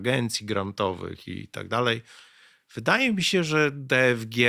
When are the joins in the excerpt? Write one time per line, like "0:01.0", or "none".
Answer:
none